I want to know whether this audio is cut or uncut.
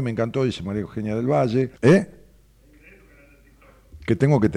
cut